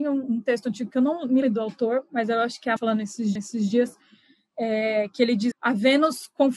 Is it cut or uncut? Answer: cut